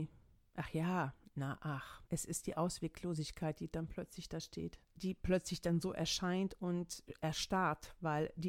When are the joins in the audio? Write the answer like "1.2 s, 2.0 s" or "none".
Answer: 2.1 s, 4.8 s